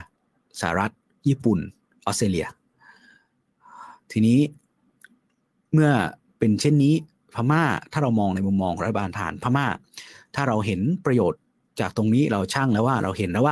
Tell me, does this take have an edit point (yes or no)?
no